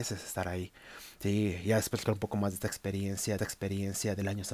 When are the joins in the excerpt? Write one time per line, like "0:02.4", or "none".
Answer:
0:02.1
0:03.4